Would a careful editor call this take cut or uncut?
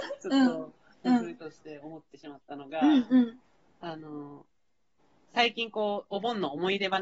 uncut